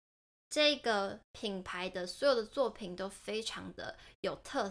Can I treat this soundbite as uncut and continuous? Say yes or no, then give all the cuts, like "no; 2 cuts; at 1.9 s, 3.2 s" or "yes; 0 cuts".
no; 1 cut; at 1.2 s